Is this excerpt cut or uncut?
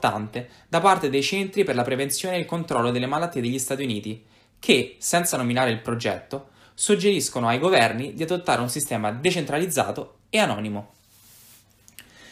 uncut